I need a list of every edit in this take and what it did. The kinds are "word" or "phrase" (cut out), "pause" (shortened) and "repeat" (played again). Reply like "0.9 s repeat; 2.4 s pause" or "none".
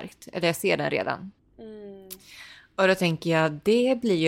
1.4 s pause